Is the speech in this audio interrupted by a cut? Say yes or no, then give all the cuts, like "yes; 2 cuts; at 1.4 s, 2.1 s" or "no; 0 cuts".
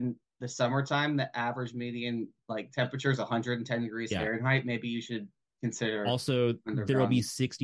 no; 0 cuts